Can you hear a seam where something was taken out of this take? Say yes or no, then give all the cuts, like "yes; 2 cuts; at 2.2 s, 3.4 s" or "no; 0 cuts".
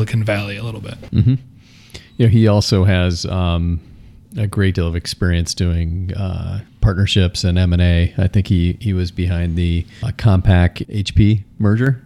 yes; 1 cut; at 10.8 s